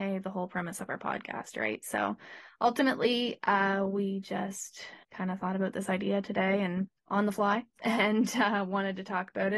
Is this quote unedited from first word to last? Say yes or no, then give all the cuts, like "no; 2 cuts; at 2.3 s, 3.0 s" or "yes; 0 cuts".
no; 2 cuts; at 5.0 s, 7.0 s